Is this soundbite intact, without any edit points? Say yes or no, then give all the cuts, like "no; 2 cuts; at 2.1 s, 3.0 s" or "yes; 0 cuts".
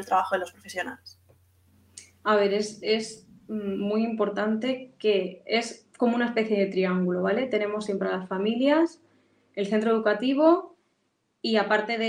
yes; 0 cuts